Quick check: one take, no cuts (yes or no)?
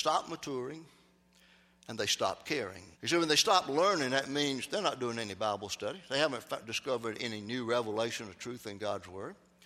no